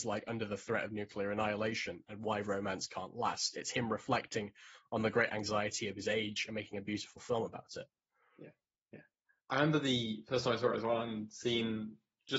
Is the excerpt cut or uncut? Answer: uncut